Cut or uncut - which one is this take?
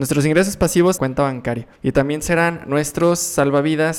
cut